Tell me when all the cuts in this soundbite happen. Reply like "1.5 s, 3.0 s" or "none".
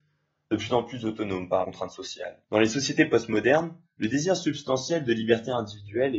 1.6 s, 2.4 s